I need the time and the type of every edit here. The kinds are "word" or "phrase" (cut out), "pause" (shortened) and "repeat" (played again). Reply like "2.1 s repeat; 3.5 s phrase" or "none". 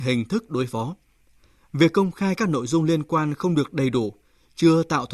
none

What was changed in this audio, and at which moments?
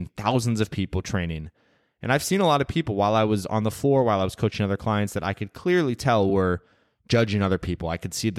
none

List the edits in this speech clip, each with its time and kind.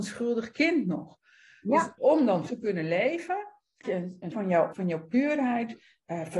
2.0 s word; 2.5 s word; 3.8 s word; 4.3 s word; 4.7 s word

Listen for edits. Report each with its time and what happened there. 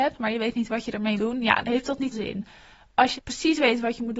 1.2 s word; 1.6 s word; 2.1 s word; 3.2 s word

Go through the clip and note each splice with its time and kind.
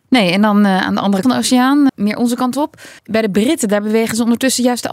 1.2 s word; 1.9 s word; 3.0 s pause

